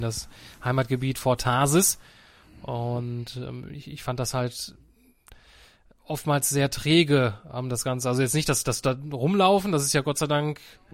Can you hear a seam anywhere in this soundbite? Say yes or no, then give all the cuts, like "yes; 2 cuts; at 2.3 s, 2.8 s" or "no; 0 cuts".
no; 0 cuts